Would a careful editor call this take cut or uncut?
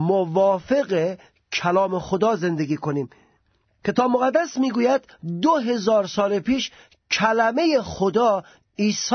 uncut